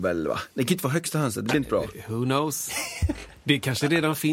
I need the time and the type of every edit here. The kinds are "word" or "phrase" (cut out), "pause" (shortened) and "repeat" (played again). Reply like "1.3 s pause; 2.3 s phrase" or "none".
none